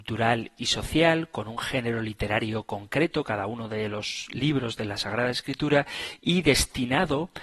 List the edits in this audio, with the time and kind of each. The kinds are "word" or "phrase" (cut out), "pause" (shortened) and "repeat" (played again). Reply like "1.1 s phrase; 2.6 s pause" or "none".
none